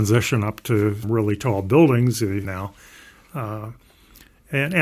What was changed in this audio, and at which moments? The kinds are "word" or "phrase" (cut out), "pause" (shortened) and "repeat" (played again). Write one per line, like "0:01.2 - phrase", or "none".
0:01.0 - word
0:02.4 - phrase